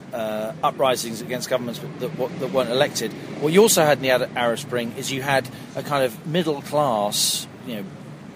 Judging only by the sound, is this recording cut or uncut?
uncut